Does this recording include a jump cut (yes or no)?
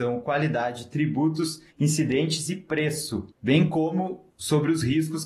yes